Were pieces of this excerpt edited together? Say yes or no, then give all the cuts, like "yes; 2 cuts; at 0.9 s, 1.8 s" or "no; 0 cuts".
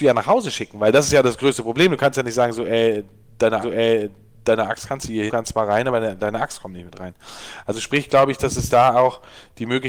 yes; 2 cuts; at 3.6 s, 5.3 s